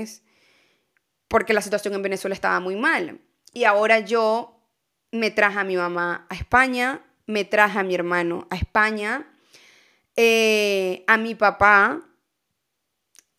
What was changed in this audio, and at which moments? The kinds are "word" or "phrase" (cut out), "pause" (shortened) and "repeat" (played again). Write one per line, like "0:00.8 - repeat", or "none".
none